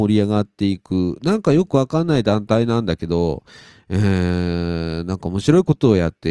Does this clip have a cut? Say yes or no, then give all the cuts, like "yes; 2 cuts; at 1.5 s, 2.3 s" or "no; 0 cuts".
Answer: no; 0 cuts